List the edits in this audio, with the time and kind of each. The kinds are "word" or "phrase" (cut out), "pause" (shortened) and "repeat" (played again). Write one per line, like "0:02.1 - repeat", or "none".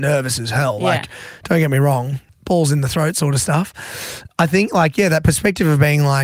0:04.3 - pause